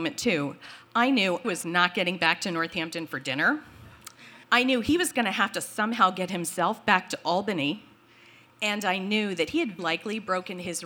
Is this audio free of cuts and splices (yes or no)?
no